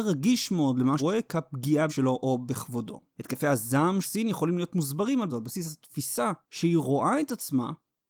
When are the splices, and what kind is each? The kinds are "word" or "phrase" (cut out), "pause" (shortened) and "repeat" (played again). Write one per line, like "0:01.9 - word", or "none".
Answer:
0:01.0 - word
0:01.9 - word
0:03.1 - pause
0:04.0 - word
0:05.3 - phrase
0:06.4 - pause